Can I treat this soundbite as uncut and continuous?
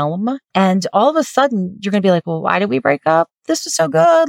yes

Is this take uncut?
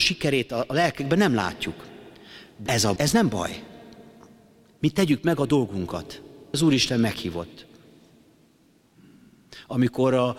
no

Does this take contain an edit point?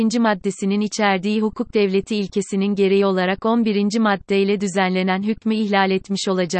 no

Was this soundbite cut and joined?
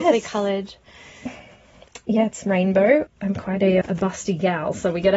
yes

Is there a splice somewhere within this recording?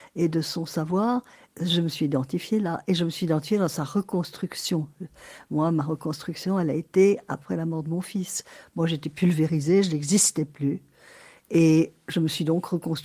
no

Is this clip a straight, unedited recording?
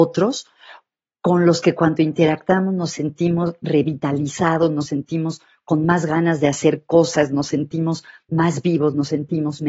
yes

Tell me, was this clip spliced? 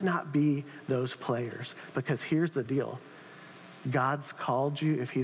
no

